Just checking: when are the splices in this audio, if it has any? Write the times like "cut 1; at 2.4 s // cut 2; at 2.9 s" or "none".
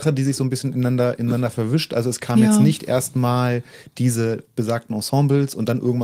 none